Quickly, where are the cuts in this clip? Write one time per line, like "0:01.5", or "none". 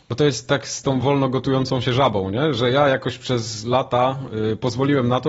none